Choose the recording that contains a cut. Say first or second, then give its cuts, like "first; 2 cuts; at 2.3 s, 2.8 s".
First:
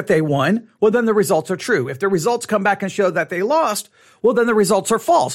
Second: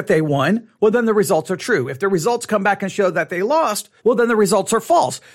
second; 1 cut; at 4.0 s